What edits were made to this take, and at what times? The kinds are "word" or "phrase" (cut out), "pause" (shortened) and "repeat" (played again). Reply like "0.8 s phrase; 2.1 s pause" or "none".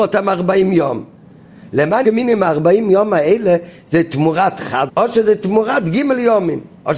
2.0 s word; 4.9 s phrase